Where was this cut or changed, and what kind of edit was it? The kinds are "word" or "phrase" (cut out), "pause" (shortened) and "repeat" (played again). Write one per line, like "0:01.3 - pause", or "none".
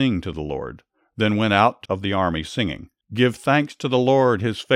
0:01.9 - phrase
0:03.0 - pause